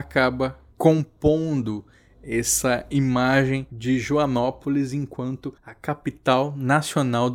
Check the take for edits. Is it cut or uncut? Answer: cut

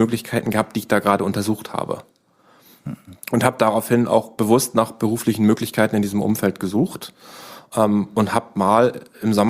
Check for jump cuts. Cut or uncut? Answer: cut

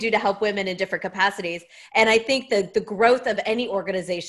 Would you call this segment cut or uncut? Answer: uncut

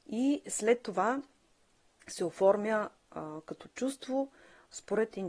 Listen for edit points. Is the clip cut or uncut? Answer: uncut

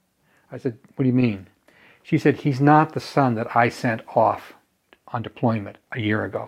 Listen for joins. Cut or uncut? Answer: uncut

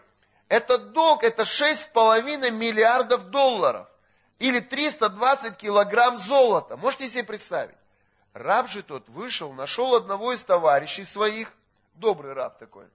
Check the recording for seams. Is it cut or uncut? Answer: uncut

